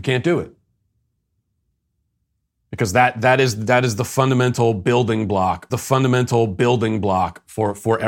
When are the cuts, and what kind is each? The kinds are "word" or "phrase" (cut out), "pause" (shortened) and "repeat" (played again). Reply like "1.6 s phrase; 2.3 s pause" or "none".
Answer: 5.7 s repeat